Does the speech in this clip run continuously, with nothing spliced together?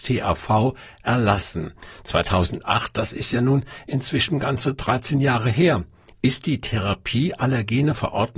yes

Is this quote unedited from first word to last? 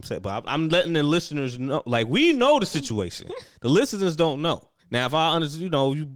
no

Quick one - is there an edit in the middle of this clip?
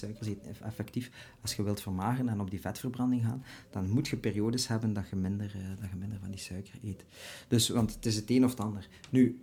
no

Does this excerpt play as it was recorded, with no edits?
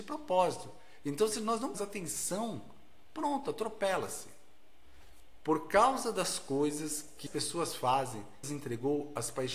no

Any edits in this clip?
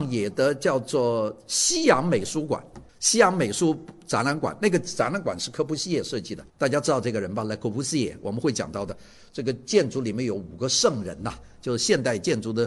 yes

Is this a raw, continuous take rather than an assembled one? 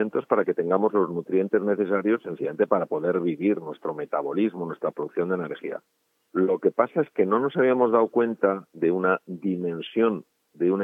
yes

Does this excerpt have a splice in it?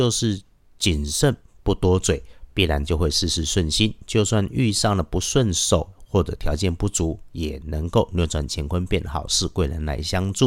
no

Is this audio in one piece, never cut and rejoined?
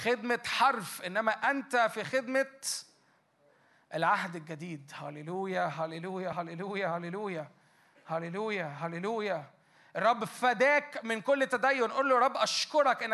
yes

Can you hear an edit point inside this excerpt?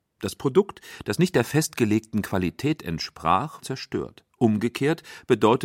yes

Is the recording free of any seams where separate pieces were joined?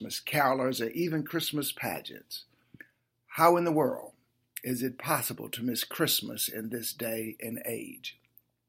yes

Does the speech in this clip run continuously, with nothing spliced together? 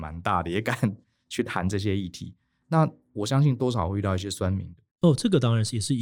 no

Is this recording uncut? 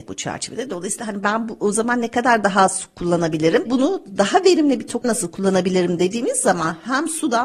no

